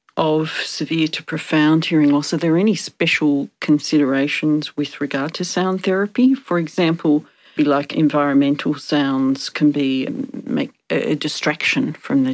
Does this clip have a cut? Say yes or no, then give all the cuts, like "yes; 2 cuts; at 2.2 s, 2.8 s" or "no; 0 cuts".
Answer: yes; 1 cut; at 7.6 s